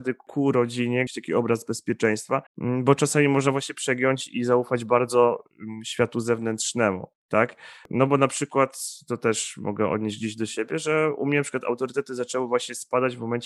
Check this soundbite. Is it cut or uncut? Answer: cut